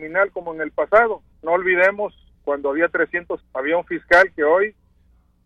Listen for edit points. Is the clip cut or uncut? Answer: cut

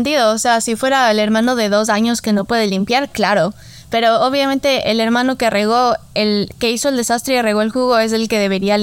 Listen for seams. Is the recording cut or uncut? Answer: uncut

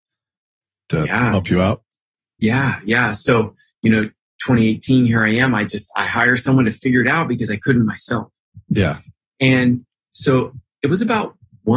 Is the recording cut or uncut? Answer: uncut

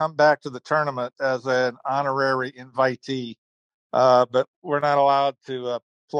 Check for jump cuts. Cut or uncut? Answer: uncut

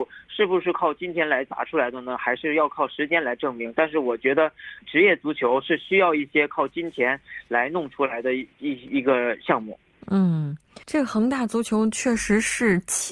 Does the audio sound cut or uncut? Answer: cut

